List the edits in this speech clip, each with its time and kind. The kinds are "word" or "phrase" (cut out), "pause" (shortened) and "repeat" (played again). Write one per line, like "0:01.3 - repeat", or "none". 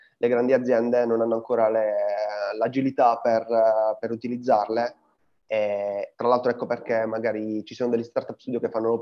0:06.1 - pause